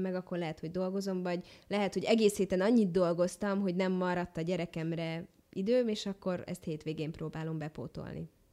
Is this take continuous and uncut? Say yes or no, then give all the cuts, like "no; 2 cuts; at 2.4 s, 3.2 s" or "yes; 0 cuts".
yes; 0 cuts